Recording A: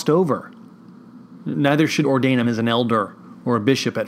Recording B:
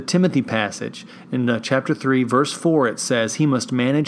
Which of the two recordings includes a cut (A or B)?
A